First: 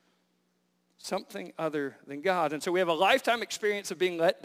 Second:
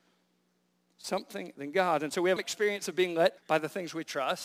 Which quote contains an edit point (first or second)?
second